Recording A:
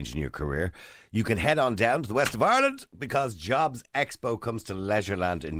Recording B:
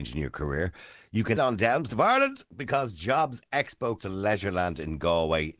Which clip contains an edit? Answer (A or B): B